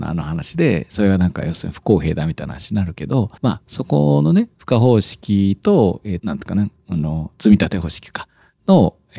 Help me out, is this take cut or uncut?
cut